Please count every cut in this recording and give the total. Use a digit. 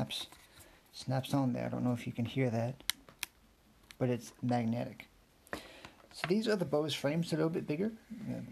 0